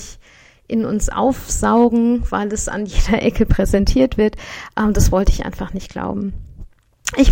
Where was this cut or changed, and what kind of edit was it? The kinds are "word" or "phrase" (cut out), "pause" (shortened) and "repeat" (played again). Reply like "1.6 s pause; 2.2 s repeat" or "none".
none

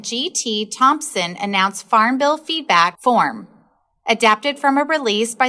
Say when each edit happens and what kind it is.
none

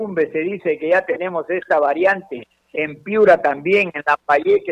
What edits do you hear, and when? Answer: none

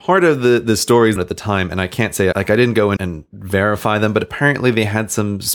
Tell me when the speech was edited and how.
1.2 s phrase; 2.3 s word; 3.0 s word

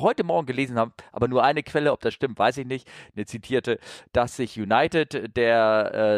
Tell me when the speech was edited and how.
none

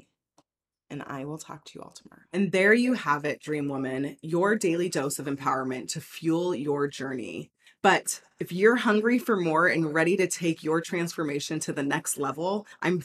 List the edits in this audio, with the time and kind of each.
none

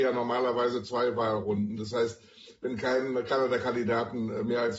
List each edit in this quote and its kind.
none

